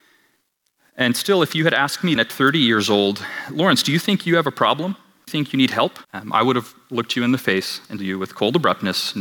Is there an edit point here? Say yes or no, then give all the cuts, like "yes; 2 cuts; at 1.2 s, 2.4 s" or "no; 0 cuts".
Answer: yes; 4 cuts; at 2.2 s, 5.3 s, 6.0 s, 8.0 s